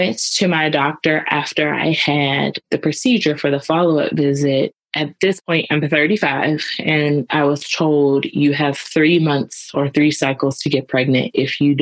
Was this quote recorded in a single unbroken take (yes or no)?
yes